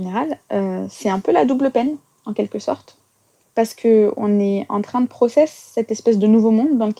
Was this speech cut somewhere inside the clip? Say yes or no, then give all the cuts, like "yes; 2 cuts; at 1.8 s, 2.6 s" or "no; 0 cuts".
no; 0 cuts